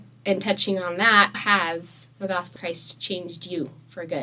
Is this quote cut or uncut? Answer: cut